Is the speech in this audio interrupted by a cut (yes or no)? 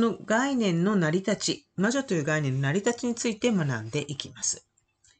no